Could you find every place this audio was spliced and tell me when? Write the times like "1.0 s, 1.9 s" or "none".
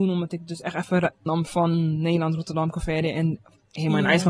1.3 s